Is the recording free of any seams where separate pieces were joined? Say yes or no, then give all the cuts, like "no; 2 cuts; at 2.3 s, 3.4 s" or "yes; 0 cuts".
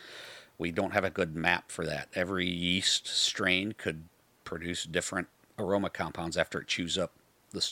yes; 0 cuts